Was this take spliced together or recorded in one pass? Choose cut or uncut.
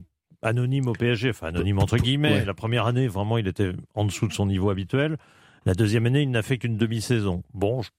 uncut